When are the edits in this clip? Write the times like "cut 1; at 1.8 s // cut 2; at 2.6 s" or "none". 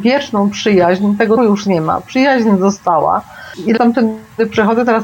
cut 1; at 1.4 s // cut 2; at 3.8 s

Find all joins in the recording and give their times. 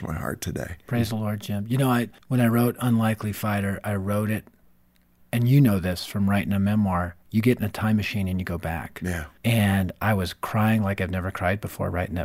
cut 1; at 2.2 s // cut 2; at 9.4 s

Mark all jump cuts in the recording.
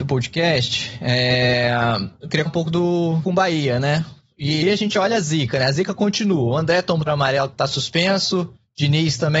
cut 1; at 2.5 s // cut 2; at 3.2 s // cut 3; at 4.6 s // cut 4; at 7.1 s // cut 5; at 7.5 s

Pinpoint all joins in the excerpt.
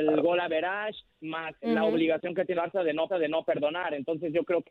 cut 1; at 1.6 s // cut 2; at 2.5 s // cut 3; at 3.1 s

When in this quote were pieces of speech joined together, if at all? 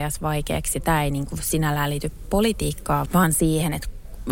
cut 1; at 3.1 s

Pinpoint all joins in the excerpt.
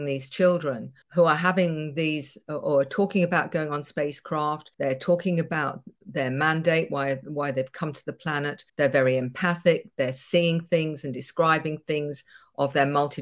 cut 1; at 1.0 s // cut 2; at 4.7 s // cut 3; at 8.7 s

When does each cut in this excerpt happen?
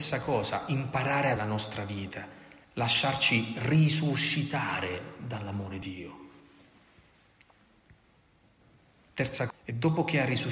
cut 1; at 1.4 s // cut 2; at 2.6 s // cut 3; at 5.8 s // cut 4; at 9.5 s

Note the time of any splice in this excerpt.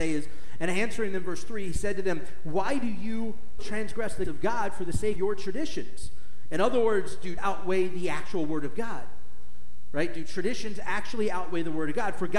cut 1; at 3.6 s // cut 2; at 4.2 s // cut 3; at 5.1 s // cut 4; at 7.4 s

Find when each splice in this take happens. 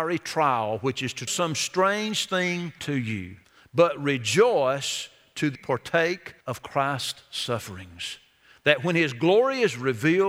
cut 1; at 1.3 s // cut 2; at 2.8 s // cut 3; at 3.4 s // cut 4; at 5.6 s // cut 5; at 6.4 s

